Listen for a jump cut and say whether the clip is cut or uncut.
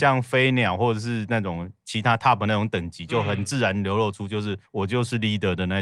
uncut